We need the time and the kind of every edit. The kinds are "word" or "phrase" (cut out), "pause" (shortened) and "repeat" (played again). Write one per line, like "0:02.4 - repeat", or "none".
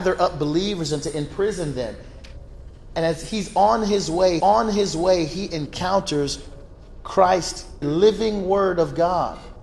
0:04.4 - repeat
0:07.8 - phrase

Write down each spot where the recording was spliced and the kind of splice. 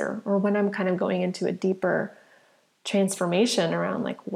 none

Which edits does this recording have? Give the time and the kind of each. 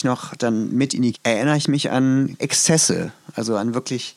0:01.1 - phrase
0:02.4 - word

